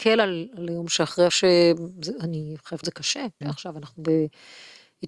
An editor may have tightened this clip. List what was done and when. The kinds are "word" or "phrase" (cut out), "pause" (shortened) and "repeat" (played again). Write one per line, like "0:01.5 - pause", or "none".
0:01.3 - word
0:02.8 - word
0:03.4 - word